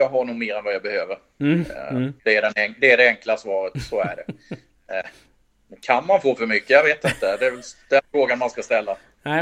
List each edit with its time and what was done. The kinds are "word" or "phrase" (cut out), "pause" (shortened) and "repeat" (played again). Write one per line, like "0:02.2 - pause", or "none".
0:02.2 - pause